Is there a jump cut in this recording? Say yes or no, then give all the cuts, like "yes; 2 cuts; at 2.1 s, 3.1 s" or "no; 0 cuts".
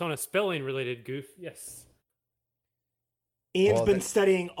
no; 0 cuts